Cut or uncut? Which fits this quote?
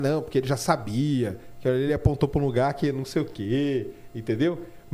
uncut